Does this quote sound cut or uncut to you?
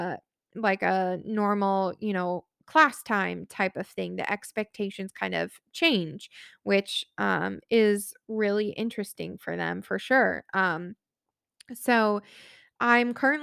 uncut